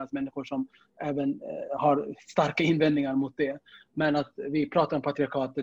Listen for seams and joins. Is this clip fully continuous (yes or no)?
yes